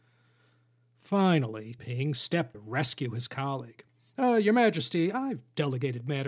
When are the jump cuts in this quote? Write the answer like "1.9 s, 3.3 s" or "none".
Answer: 1.8 s, 2.5 s